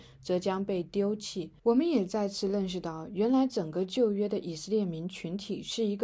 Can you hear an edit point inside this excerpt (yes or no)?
yes